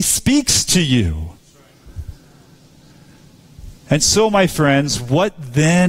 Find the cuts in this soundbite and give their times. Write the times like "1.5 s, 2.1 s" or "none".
none